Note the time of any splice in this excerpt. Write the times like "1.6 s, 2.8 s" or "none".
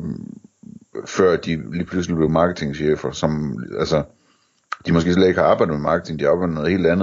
none